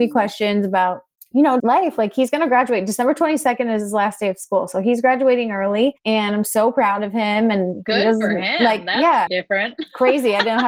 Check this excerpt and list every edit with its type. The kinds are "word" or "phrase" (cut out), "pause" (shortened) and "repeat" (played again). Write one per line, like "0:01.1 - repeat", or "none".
0:01.2 - pause
0:01.6 - word
0:06.0 - pause
0:09.3 - word